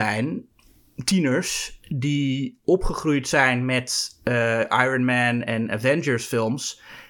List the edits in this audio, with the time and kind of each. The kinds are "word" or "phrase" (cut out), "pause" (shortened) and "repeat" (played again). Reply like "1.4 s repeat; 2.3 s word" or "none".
none

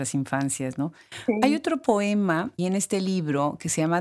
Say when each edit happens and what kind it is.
2.6 s word

